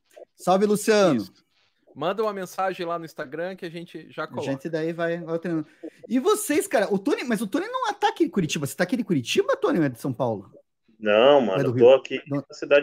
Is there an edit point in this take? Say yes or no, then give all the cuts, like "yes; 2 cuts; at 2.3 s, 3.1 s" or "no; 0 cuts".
no; 0 cuts